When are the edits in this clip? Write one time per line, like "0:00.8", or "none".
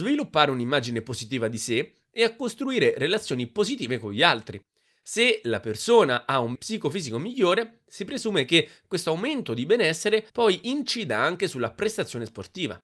0:06.6
0:10.3